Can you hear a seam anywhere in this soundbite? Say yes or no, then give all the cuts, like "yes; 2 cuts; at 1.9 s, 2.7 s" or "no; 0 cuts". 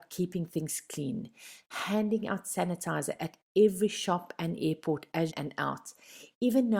yes; 1 cut; at 5.3 s